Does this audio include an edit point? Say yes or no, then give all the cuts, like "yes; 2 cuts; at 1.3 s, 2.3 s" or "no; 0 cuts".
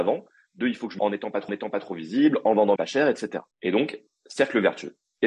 yes; 4 cuts; at 1.0 s, 1.5 s, 2.8 s, 3.5 s